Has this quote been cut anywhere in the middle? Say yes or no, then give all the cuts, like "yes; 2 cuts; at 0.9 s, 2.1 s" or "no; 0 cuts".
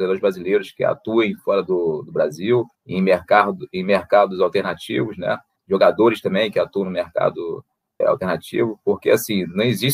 yes; 3 cuts; at 2.7 s, 5.6 s, 8.0 s